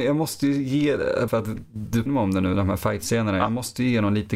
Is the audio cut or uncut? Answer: cut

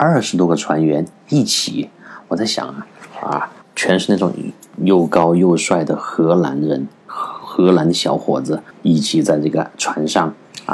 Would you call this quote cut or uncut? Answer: cut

